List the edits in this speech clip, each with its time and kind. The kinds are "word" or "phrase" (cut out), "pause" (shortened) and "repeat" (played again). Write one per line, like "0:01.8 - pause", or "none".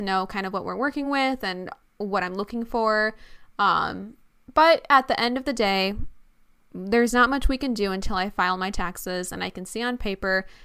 none